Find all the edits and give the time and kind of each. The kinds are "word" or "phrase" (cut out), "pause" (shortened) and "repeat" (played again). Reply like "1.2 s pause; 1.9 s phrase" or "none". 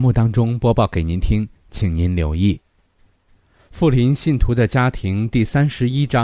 none